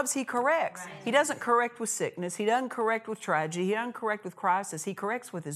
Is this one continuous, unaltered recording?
yes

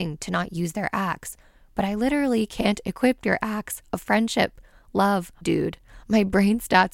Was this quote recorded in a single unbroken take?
no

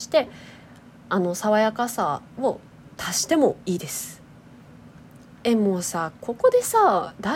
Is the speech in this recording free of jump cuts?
no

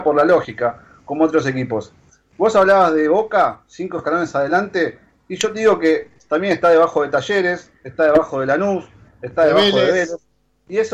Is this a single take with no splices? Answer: yes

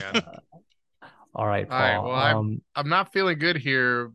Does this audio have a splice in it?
no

